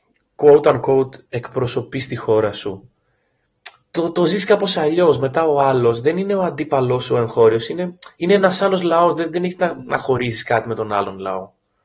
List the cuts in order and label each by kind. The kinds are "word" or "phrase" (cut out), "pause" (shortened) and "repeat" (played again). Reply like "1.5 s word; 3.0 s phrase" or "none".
none